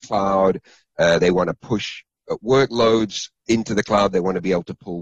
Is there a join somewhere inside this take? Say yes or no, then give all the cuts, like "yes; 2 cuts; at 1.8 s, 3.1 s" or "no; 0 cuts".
no; 0 cuts